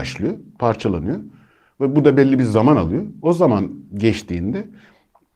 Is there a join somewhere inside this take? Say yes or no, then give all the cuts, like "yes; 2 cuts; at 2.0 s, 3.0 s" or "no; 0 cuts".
no; 0 cuts